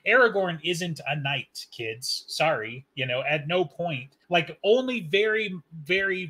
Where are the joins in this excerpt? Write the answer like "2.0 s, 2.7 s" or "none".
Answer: 4.2 s